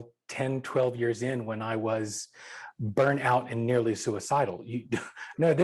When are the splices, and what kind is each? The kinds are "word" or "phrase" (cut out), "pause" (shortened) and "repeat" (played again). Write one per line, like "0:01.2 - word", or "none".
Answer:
none